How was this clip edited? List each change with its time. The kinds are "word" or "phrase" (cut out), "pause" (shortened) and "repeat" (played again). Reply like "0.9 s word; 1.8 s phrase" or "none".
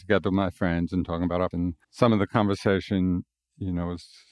1.5 s word; 1.8 s pause